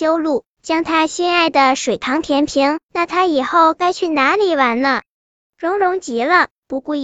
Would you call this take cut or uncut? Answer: uncut